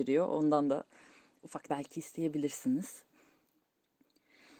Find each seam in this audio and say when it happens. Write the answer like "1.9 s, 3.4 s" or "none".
1.7 s